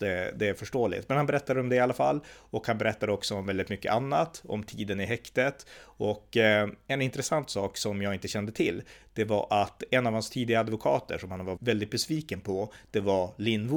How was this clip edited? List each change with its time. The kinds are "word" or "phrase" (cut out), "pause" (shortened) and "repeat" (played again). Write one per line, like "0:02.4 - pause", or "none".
0:11.6 - word